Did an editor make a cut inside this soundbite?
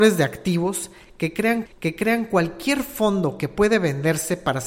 yes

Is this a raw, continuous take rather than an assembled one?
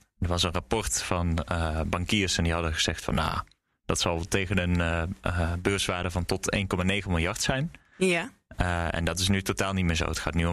yes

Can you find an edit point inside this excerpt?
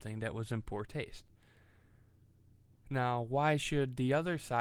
no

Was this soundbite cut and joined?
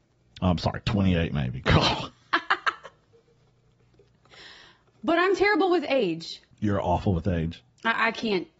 yes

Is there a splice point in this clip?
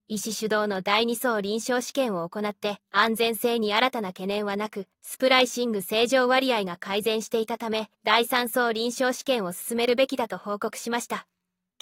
yes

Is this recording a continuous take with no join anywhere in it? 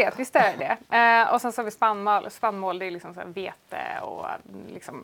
yes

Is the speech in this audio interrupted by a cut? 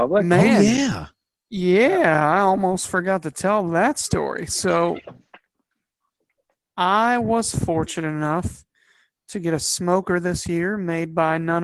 no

